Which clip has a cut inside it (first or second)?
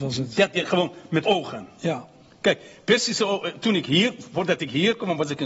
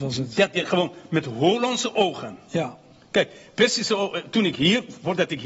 first